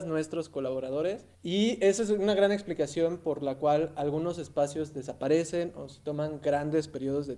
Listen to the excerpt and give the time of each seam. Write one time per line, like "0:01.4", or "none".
0:01.3

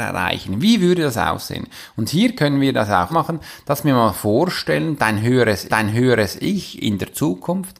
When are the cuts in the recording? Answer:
0:03.1
0:05.7

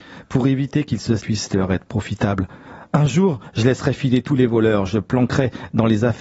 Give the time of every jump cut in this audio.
0:01.2

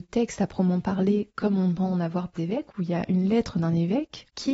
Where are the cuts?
0:02.4

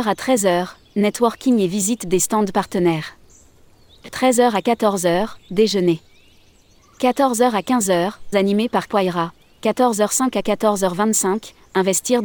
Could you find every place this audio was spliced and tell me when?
0:08.3
0:08.9

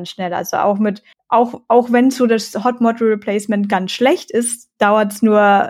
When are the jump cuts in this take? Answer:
0:01.1

